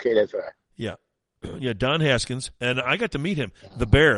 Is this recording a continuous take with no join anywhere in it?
yes; 0 cuts

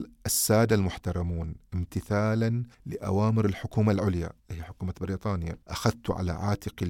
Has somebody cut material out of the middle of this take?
yes; 3 cuts; at 2.7 s, 4.4 s, 5.6 s

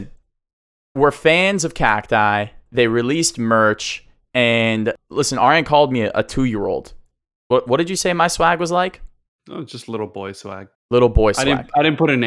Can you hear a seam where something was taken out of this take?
no; 0 cuts

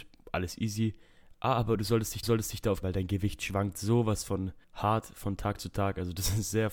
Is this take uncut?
no; 3 cuts; at 2.2 s, 2.8 s, 4.6 s

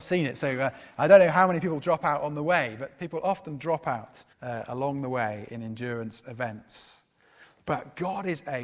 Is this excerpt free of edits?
no; 1 cut; at 4.3 s

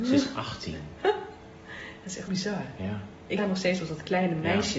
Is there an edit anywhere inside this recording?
yes; 2 cuts; at 2.3 s, 3.4 s

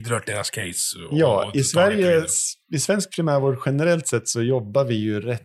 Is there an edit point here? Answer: no; 0 cuts

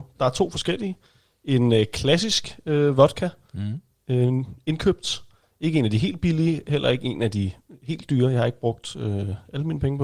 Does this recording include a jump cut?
no; 0 cuts

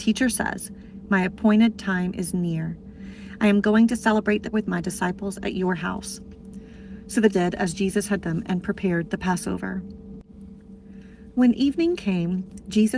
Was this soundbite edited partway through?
yes; 3 cuts; at 4.5 s, 7.3 s, 8.2 s

